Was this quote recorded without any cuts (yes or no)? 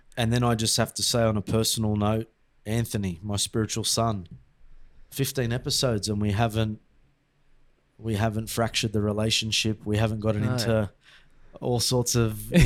yes